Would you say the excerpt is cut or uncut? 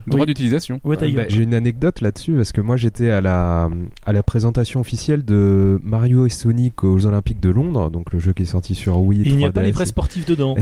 cut